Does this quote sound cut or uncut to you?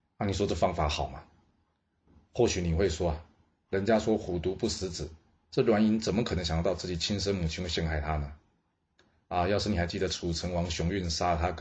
uncut